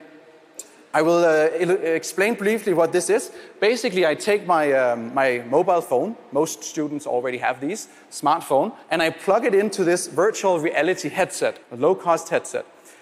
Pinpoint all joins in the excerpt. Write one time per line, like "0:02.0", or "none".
0:08.8
0:11.6